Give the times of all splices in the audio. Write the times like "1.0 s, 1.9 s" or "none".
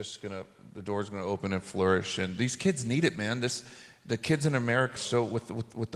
5.0 s